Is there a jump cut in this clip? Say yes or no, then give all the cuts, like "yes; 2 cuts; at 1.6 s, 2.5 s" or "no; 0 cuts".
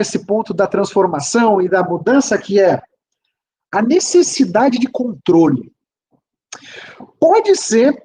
no; 0 cuts